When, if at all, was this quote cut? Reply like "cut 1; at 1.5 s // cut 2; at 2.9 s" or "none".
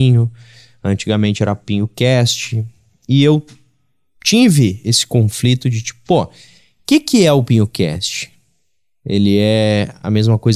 none